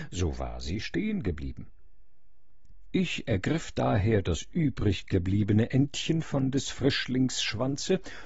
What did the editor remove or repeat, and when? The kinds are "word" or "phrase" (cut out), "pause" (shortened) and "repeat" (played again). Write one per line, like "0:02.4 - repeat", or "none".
none